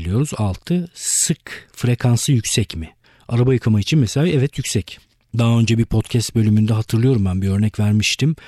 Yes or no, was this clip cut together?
no